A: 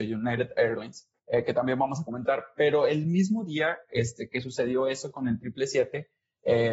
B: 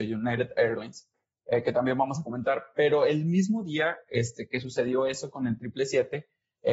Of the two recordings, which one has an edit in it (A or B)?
A